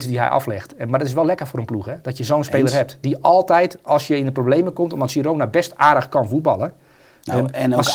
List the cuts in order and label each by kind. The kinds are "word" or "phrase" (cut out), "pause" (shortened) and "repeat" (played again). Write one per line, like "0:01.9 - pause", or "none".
none